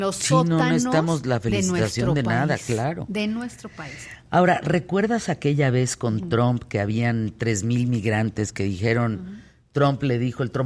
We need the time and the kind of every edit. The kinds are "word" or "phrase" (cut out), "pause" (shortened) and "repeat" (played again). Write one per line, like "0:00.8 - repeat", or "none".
none